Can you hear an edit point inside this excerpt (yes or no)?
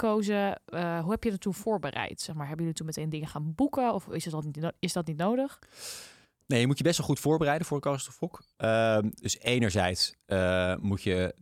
no